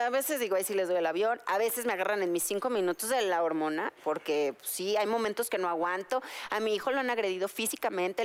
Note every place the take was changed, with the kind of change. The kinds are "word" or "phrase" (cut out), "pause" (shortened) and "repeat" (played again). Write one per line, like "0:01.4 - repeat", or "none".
none